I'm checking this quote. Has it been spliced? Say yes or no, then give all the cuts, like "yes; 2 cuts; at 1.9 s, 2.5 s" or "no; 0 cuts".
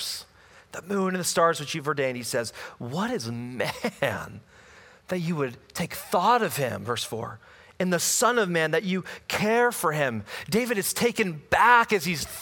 no; 0 cuts